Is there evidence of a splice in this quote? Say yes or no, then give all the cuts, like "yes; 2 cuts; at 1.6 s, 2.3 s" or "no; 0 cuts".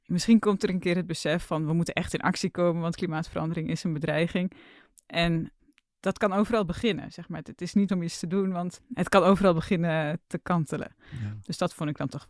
yes; 1 cut; at 7.9 s